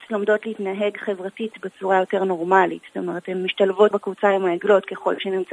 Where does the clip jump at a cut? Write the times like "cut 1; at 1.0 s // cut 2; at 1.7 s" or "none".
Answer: cut 1; at 3.9 s